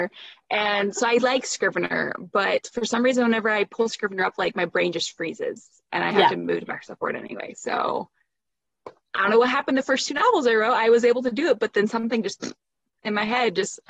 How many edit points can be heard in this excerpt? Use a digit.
0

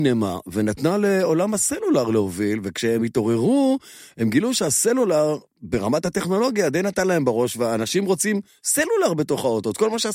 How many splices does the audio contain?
0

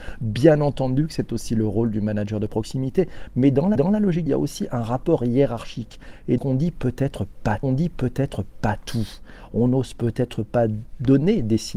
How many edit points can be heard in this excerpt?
4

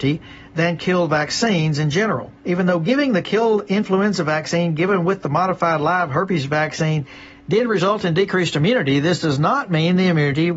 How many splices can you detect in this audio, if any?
1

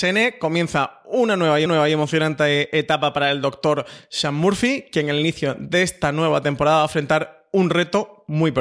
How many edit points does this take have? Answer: 1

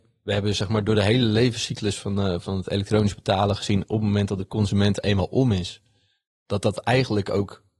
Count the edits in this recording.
0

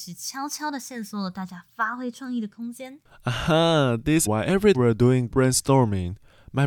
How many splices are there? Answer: 3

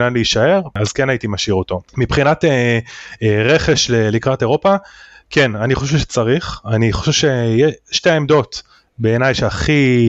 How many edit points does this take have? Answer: 0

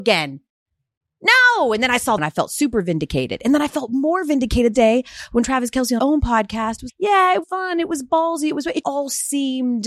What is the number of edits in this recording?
6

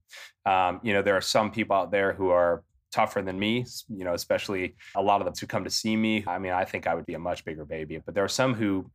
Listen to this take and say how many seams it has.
5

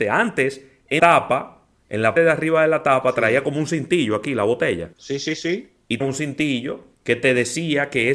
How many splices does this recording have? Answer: 5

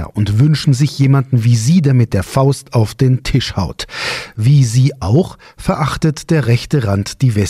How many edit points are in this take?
0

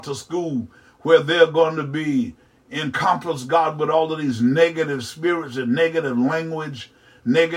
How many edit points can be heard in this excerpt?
0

